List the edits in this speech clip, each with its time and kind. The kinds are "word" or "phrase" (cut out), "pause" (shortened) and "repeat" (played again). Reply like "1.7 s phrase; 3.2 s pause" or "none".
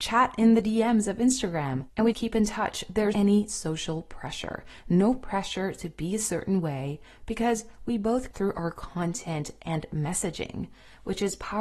2.1 s word; 3.1 s word; 8.3 s word